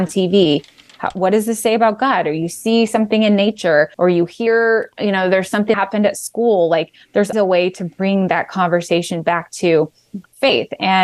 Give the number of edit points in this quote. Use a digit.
3